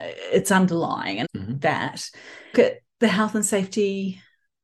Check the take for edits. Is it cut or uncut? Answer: cut